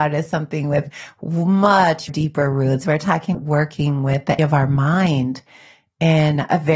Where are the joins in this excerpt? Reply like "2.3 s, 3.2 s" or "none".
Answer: 2.1 s, 3.3 s, 4.4 s